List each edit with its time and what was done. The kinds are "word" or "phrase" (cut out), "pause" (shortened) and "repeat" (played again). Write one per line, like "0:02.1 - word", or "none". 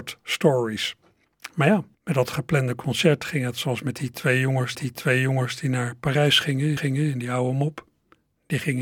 0:01.9 - pause
0:04.7 - repeat
0:06.8 - repeat